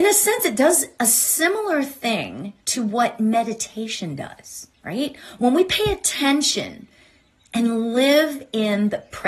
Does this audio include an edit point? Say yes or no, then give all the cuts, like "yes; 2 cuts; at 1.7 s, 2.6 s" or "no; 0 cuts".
yes; 2 cuts; at 2.6 s, 4.7 s